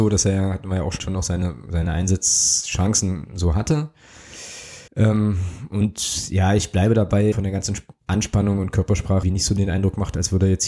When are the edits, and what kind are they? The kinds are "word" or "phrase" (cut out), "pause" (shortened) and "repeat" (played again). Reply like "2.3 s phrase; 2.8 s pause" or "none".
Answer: 1.0 s phrase; 4.9 s pause; 7.3 s word; 9.2 s phrase